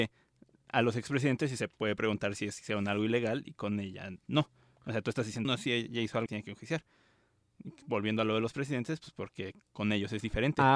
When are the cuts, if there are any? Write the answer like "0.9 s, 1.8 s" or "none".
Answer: 5.4 s, 6.3 s

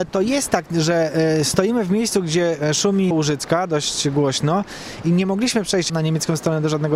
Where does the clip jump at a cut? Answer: 3.1 s

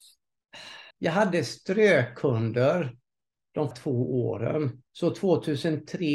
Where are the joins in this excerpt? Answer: 0.9 s, 3.7 s, 4.9 s

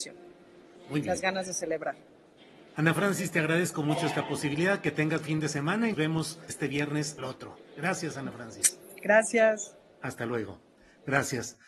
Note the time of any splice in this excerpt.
5.2 s, 5.9 s, 6.5 s, 7.2 s

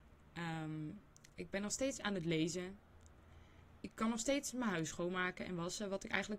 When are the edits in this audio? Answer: 1.1 s, 3.8 s

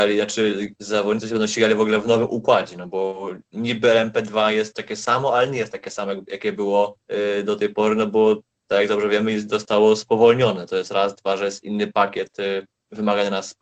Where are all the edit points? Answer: 7.0 s

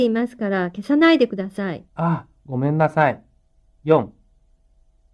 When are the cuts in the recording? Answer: 1.9 s, 3.5 s

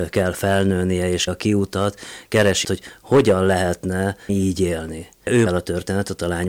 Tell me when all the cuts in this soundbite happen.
1.3 s, 2.6 s, 4.3 s, 5.5 s

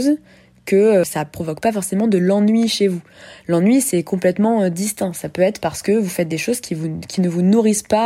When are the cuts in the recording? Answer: none

